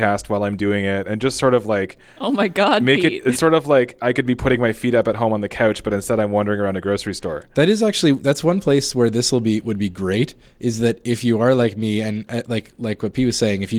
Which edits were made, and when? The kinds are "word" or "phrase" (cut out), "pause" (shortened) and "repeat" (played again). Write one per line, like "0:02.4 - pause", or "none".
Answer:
none